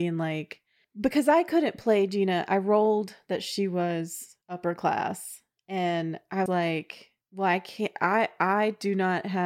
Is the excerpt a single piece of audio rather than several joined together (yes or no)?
no